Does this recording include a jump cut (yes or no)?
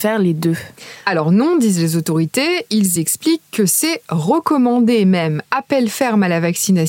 no